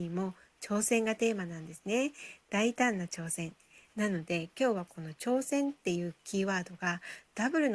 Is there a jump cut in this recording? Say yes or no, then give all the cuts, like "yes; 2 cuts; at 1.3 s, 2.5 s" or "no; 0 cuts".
no; 0 cuts